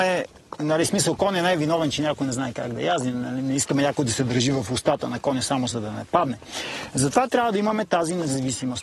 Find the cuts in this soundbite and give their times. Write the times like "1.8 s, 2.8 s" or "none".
none